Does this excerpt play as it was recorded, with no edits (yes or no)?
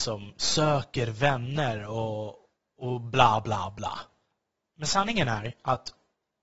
yes